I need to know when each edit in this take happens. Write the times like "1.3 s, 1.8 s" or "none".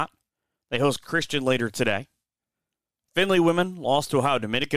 1.0 s